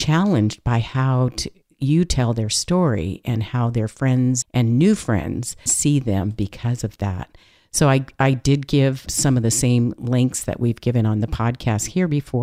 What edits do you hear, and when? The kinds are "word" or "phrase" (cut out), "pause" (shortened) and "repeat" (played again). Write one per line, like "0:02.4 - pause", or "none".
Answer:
0:04.4 - word
0:05.7 - word